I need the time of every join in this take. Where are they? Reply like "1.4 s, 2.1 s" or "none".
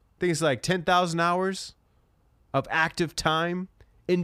none